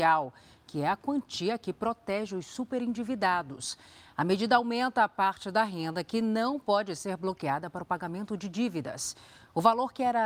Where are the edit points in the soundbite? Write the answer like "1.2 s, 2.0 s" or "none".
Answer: none